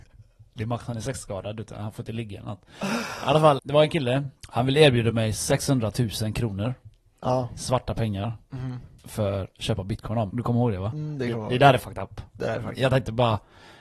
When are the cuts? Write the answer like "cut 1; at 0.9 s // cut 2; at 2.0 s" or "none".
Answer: cut 1; at 3.6 s // cut 2; at 4.4 s // cut 3; at 10.3 s